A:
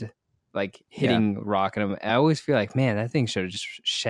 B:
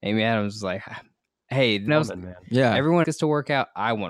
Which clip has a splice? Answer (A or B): B